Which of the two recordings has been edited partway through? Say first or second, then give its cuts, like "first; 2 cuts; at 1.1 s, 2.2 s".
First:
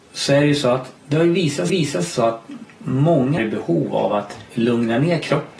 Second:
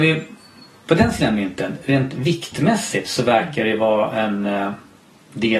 first; 4 cuts; at 1.0 s, 1.7 s, 3.4 s, 4.5 s